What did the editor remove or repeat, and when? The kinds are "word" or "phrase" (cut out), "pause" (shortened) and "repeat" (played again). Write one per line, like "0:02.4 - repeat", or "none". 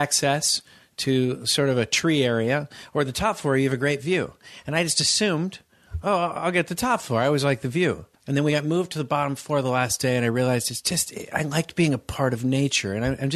0:08.2 - pause

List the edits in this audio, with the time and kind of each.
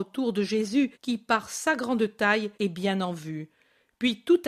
0:00.9 - pause
0:02.5 - pause

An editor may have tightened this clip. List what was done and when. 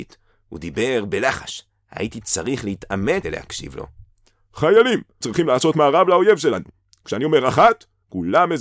0:03.2 - word
0:05.2 - word

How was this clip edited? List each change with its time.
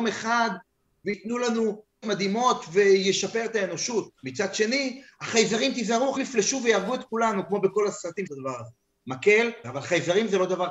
0:02.0 - word
0:04.2 - pause
0:06.2 - word
0:08.3 - phrase
0:09.6 - word

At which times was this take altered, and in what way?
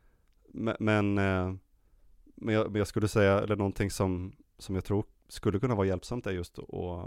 none

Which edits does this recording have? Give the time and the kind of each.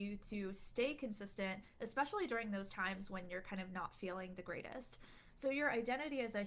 none

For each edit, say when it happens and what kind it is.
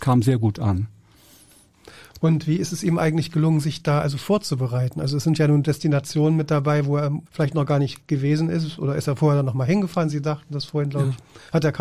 0:07.3 - pause

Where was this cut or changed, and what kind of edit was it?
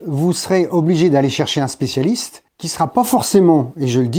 0:02.5 - pause

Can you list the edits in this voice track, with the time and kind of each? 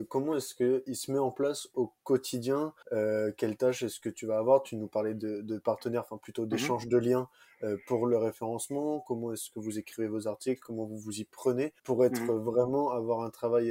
0:02.8 - pause
0:11.8 - pause

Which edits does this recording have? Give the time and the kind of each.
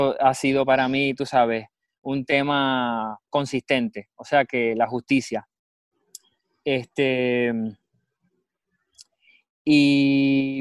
none

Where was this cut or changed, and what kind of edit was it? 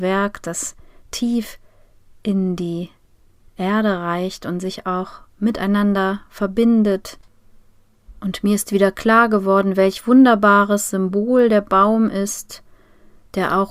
none

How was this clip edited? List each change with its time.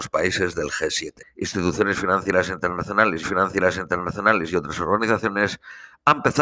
0:01.2 - pause
0:03.2 - repeat

